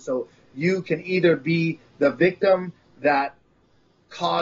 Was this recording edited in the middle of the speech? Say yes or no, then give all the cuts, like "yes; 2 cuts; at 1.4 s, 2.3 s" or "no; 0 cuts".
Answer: no; 0 cuts